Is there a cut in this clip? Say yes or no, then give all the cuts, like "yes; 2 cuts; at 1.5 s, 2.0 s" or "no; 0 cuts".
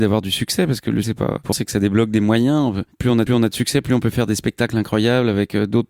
yes; 3 cuts; at 1.0 s, 1.5 s, 3.3 s